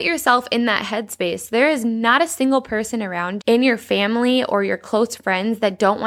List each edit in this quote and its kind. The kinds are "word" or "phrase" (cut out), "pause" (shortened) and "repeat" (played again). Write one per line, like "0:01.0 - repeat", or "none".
0:03.4 - word